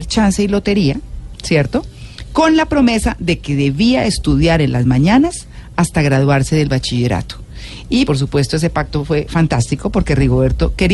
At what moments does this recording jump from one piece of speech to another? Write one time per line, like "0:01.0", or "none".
0:08.1

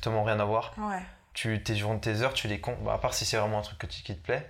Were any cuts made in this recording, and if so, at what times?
none

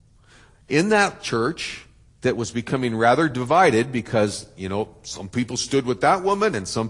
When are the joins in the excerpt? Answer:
none

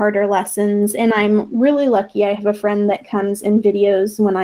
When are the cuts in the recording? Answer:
none

